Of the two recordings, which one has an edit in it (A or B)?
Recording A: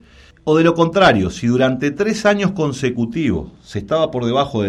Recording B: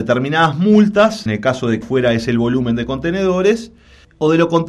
B